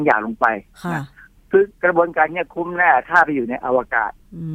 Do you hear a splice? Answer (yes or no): yes